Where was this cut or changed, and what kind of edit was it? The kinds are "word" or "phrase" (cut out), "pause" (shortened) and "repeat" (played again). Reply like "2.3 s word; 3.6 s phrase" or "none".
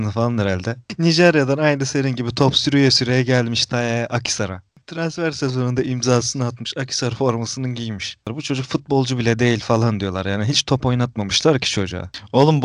none